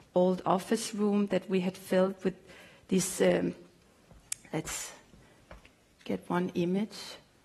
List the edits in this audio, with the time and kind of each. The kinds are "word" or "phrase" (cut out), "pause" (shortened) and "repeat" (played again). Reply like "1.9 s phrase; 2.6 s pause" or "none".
none